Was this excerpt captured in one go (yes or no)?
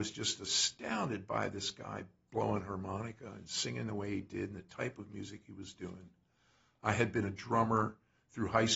yes